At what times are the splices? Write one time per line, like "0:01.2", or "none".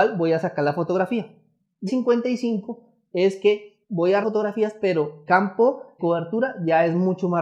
0:01.9
0:03.8
0:04.2
0:05.3
0:06.0